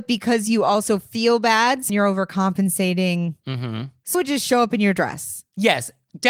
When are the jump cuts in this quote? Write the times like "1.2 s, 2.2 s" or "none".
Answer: 1.9 s, 4.1 s